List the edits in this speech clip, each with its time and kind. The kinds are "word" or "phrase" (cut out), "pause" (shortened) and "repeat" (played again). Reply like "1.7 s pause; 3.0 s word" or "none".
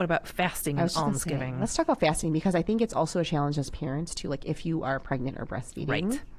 none